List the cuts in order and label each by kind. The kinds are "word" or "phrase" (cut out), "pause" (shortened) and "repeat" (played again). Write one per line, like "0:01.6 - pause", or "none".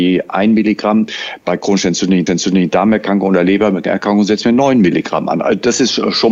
0:02.3 - repeat